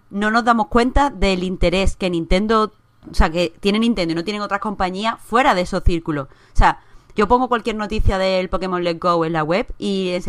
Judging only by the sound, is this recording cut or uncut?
cut